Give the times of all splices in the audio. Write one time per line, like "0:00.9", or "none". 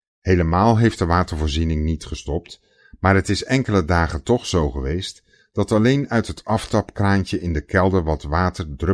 none